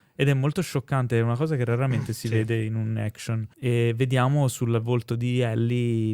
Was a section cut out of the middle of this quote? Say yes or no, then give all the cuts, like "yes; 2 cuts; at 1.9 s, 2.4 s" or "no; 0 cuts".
yes; 1 cut; at 3.5 s